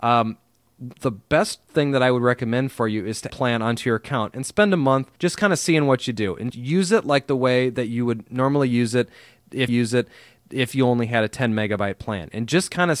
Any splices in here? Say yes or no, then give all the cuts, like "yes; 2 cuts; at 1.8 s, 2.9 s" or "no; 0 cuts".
yes; 4 cuts; at 3.3 s, 5.2 s, 6.5 s, 9.7 s